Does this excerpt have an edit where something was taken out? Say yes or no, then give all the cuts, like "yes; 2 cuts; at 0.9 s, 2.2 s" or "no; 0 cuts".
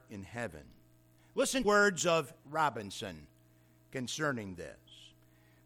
yes; 2 cuts; at 1.6 s, 2.4 s